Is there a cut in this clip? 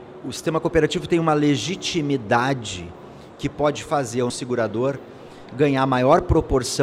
yes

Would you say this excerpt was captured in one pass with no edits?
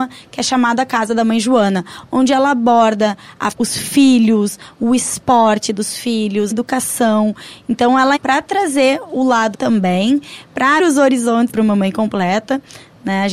no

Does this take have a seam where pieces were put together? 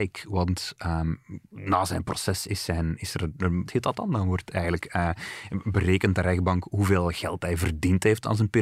yes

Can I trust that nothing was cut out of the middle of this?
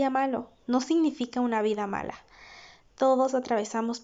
yes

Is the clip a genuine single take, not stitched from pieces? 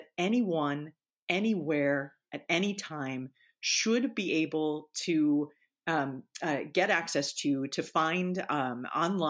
yes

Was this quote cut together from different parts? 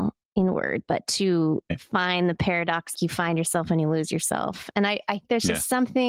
yes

